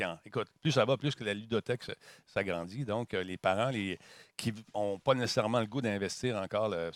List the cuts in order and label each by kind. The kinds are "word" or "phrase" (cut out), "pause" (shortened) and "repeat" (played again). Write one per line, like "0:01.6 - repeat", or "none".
none